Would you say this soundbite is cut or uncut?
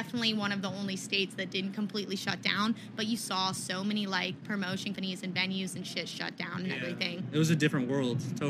cut